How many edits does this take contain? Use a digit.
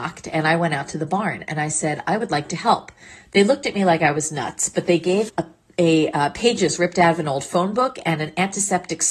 1